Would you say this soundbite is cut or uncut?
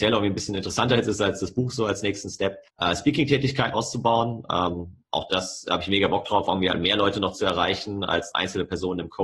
cut